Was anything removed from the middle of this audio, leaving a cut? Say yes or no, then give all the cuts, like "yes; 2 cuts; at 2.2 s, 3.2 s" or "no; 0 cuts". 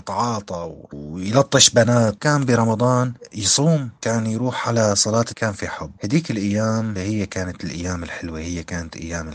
yes; 2 cuts; at 5.3 s, 7.0 s